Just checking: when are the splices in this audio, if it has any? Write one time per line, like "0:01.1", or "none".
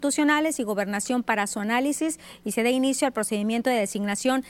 none